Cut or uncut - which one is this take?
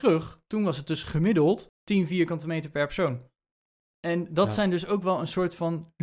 uncut